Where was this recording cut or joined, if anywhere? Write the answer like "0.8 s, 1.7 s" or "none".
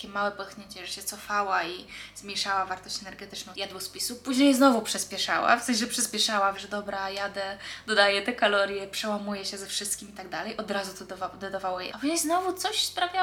3.5 s, 6.5 s, 11.9 s